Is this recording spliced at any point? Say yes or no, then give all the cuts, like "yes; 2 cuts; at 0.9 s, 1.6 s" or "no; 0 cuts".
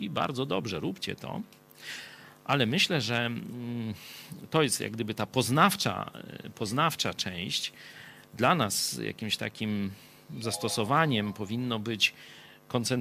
no; 0 cuts